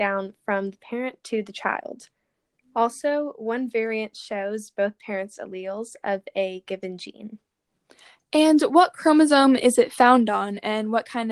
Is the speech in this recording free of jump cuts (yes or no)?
yes